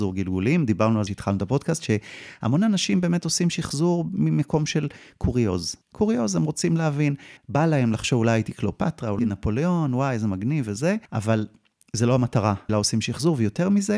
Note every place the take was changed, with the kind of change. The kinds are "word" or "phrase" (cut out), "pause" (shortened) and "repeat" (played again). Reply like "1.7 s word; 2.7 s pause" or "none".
1.1 s word; 5.8 s pause; 7.4 s pause; 9.2 s word; 11.1 s pause; 12.7 s word